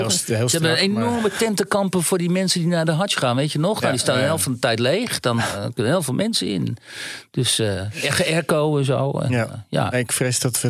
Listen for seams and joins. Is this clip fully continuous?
yes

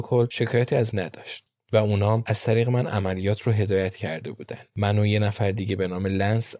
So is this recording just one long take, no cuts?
no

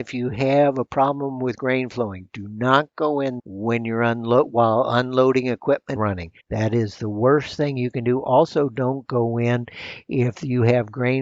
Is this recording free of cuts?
no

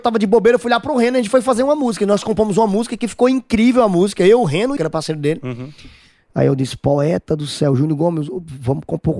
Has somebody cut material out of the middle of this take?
yes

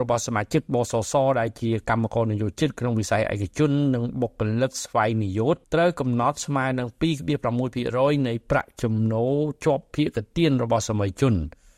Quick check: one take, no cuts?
no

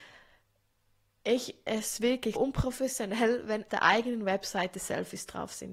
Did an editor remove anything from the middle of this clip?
yes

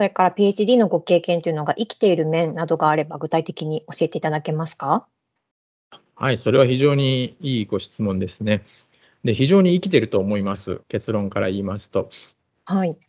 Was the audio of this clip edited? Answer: yes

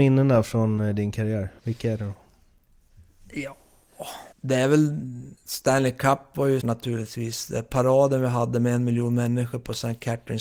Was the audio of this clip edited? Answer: yes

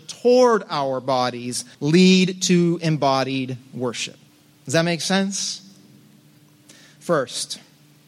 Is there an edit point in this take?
yes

